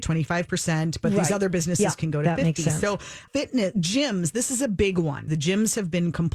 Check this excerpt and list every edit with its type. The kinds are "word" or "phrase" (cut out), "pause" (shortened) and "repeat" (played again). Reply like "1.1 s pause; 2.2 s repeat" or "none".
3.3 s word; 5.3 s word